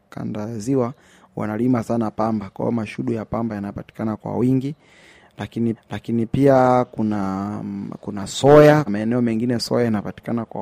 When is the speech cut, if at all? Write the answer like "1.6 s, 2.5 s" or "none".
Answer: 5.7 s, 8.9 s